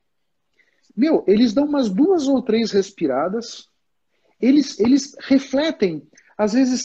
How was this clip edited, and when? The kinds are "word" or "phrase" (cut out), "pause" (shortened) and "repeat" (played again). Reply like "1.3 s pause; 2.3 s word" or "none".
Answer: none